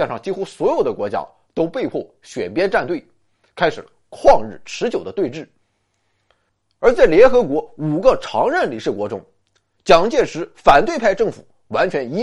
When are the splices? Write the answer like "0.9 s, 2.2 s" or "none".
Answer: none

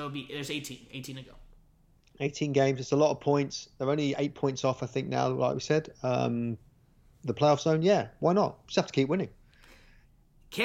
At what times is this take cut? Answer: none

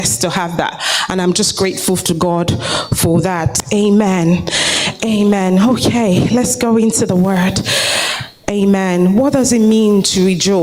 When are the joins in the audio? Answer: none

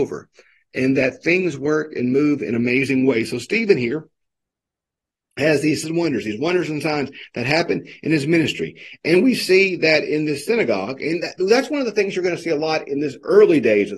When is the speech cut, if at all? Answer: 5.8 s

